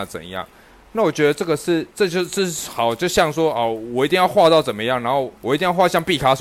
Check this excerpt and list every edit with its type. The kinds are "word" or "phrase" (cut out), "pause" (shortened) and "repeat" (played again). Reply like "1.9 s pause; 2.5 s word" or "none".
1.9 s pause; 5.4 s pause